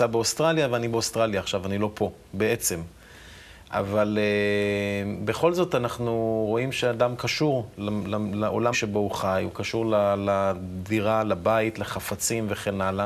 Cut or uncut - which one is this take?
cut